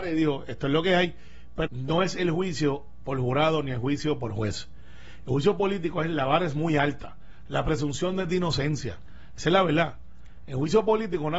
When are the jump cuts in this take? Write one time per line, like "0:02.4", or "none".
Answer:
0:01.7